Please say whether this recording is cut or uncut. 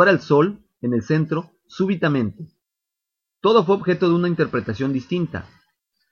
uncut